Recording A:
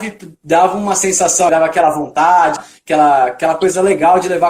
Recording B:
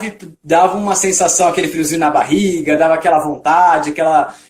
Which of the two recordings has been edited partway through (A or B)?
A